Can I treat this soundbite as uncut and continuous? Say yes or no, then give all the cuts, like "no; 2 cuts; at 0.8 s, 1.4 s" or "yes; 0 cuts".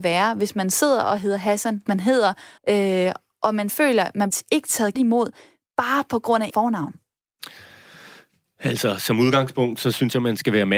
no; 6 cuts; at 1.9 s, 2.6 s, 3.7 s, 4.3 s, 5.0 s, 6.5 s